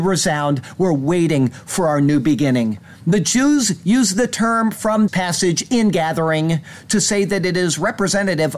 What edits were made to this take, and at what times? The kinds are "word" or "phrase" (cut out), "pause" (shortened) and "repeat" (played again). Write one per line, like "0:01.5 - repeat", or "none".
0:05.1 - word